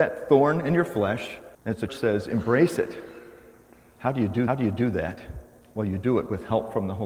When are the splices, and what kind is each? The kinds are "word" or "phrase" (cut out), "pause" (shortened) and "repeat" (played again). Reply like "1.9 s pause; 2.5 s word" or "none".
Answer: 1.5 s pause; 1.9 s word; 4.5 s repeat